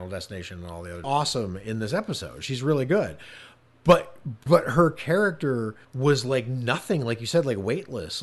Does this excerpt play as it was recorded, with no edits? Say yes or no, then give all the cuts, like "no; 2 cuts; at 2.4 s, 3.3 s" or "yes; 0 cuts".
no; 3 cuts; at 1.0 s, 4.5 s, 5.8 s